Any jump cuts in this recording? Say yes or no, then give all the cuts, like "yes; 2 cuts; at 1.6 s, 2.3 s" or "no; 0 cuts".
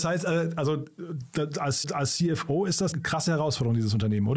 yes; 2 cuts; at 1.8 s, 2.9 s